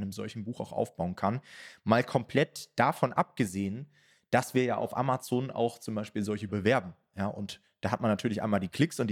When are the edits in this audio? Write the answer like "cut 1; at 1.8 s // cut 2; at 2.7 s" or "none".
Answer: cut 1; at 6.5 s